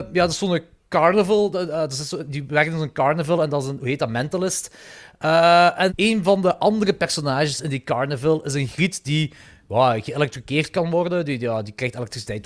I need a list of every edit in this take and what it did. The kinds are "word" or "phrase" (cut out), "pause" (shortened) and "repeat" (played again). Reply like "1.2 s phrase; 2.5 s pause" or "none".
5.9 s word